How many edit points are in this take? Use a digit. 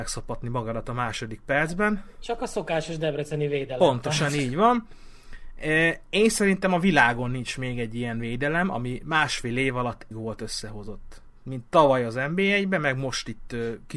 1